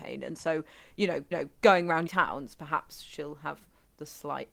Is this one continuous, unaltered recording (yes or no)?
no